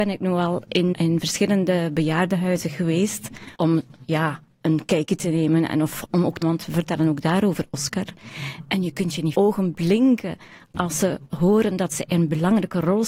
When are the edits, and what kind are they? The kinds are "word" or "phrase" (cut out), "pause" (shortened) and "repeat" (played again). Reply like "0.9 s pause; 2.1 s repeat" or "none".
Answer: 0.9 s word; 3.5 s pause; 6.4 s word; 9.3 s phrase